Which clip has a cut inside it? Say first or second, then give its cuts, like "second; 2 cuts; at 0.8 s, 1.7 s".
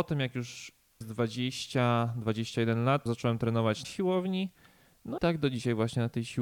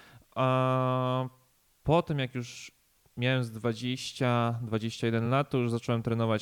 first; 4 cuts; at 1.0 s, 3.1 s, 3.8 s, 5.2 s